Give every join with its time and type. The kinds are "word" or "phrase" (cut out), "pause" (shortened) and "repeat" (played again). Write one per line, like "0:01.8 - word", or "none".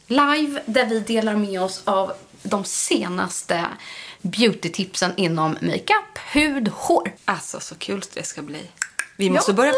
0:07.2 - pause